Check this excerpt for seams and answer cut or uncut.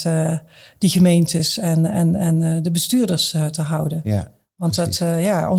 uncut